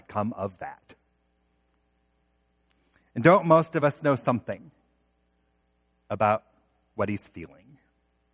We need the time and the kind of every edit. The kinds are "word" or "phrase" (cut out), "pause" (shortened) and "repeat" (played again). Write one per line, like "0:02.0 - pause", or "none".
none